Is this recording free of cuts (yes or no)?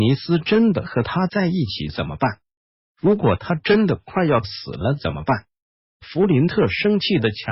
yes